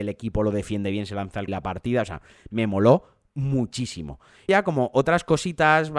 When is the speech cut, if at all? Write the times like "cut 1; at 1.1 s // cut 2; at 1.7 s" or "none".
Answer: cut 1; at 1.5 s // cut 2; at 4.5 s